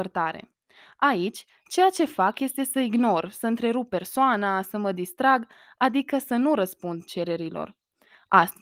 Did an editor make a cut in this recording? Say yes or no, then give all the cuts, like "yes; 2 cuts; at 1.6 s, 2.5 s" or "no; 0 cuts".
no; 0 cuts